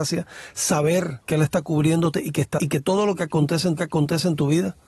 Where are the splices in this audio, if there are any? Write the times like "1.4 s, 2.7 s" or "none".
1.2 s, 2.6 s, 3.8 s